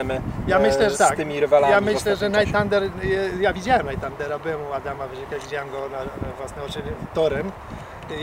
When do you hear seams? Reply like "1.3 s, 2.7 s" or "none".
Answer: 0.9 s, 7.1 s